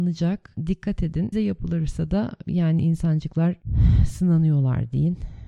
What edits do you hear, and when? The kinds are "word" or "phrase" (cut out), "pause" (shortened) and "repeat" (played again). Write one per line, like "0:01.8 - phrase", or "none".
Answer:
0:01.3 - word
0:02.4 - word